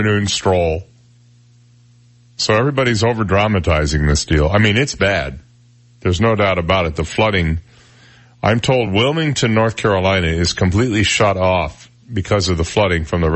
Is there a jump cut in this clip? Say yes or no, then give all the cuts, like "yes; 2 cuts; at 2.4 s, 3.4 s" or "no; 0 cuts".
no; 0 cuts